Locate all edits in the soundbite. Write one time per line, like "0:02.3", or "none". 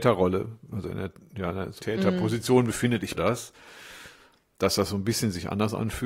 0:01.8
0:03.1